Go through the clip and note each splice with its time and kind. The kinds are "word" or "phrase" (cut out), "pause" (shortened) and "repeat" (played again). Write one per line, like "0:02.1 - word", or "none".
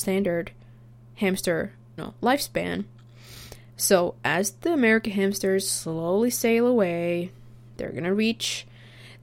0:02.0 - word